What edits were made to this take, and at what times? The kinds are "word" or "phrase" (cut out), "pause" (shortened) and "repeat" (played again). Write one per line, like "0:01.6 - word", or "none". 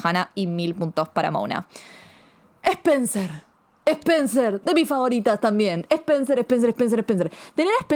none